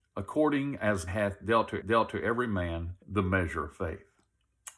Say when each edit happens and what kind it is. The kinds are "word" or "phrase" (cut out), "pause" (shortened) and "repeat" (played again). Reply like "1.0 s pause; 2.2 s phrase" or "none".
1.1 s word; 1.8 s repeat; 3.0 s pause